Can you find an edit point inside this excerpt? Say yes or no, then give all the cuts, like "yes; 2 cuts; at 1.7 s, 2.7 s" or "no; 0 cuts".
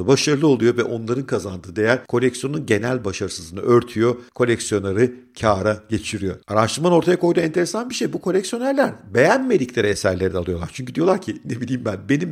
no; 0 cuts